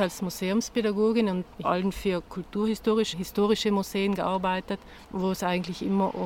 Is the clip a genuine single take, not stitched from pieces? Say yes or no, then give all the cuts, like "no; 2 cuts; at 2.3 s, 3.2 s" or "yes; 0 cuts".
no; 3 cuts; at 1.6 s, 3.1 s, 5.0 s